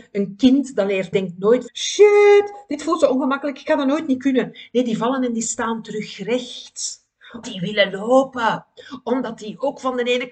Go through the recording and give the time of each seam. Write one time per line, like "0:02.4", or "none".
0:01.1
0:01.7
0:07.4

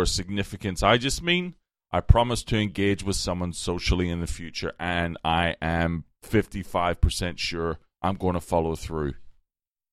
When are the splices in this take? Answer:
none

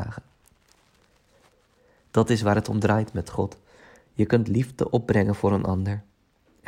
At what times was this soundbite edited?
none

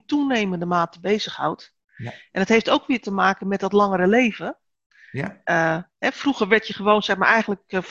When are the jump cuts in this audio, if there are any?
none

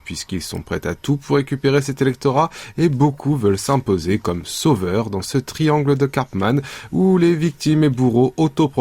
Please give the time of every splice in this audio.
none

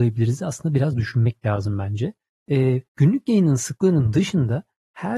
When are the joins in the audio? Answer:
0:02.9

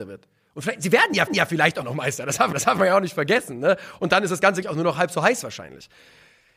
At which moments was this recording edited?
0:01.3
0:01.8
0:02.5
0:04.6

